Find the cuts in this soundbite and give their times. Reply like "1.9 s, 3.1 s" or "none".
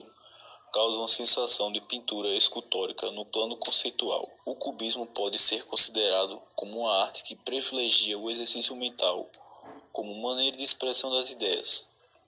4.4 s